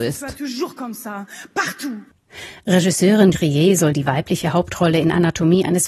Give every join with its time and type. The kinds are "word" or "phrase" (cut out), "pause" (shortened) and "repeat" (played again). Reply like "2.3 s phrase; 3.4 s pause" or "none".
3.3 s word